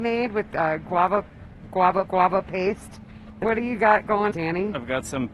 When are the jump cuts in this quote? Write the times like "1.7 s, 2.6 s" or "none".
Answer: 2.1 s, 3.4 s, 4.3 s